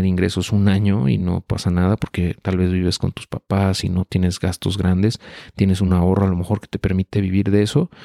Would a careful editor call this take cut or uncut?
uncut